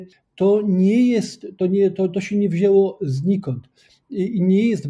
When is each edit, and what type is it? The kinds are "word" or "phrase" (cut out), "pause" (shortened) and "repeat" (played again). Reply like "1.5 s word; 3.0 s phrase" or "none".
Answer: none